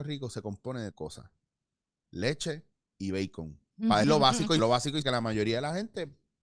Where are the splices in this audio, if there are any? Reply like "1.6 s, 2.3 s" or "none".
0.9 s, 2.9 s, 4.0 s, 4.6 s, 5.0 s